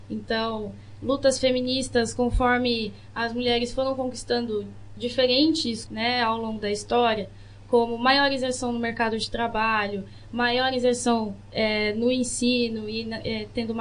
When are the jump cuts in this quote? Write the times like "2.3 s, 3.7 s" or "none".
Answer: 5.9 s